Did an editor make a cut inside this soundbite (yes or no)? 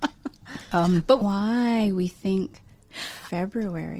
yes